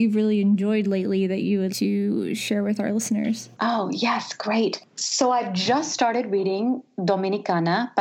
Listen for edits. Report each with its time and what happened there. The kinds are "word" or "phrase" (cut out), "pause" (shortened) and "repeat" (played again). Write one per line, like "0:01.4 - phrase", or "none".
0:01.7 - word
0:03.5 - pause